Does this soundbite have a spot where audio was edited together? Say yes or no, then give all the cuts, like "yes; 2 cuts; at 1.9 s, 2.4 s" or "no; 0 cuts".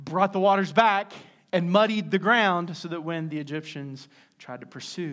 no; 0 cuts